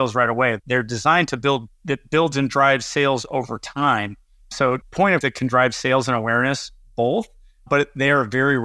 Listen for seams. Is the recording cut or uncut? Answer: cut